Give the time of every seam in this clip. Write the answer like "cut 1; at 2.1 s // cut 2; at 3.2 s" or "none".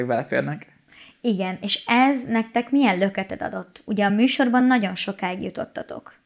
none